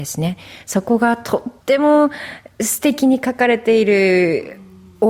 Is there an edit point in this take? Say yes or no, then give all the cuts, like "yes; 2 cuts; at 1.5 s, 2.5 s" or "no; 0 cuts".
yes; 1 cut; at 1.6 s